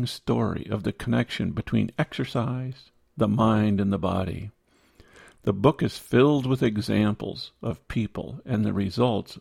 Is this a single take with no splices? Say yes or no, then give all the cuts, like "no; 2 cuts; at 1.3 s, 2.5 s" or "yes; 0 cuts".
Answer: yes; 0 cuts